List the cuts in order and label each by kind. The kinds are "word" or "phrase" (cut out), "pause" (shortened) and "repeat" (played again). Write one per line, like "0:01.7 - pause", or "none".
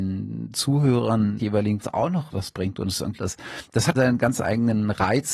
0:01.4 - word
0:01.8 - word
0:02.3 - word
0:03.2 - word
0:03.9 - word